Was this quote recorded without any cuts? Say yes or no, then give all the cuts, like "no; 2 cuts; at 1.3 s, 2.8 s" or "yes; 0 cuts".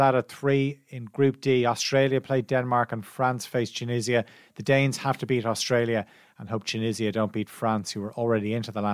yes; 0 cuts